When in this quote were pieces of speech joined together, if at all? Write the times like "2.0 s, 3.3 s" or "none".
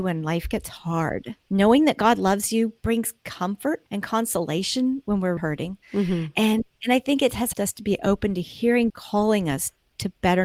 1.4 s, 2.8 s, 3.9 s, 5.4 s, 5.8 s, 6.7 s, 7.5 s, 8.9 s